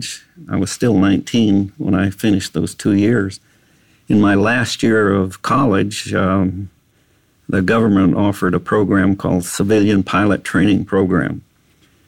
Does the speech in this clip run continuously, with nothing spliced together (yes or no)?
yes